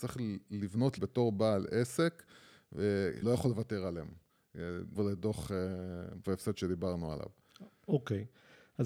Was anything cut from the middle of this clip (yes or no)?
yes